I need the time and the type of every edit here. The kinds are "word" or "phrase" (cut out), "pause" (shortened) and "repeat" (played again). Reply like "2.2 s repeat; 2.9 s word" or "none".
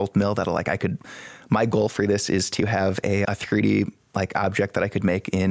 3.2 s word